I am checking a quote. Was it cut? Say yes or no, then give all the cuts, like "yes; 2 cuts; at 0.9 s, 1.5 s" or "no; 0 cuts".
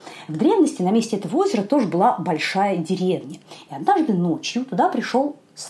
no; 0 cuts